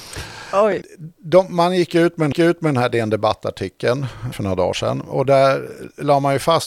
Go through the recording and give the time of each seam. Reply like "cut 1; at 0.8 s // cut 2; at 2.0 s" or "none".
cut 1; at 2.3 s // cut 2; at 4.3 s // cut 3; at 5.2 s